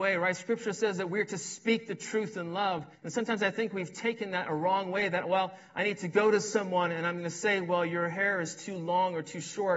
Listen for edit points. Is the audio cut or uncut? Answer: cut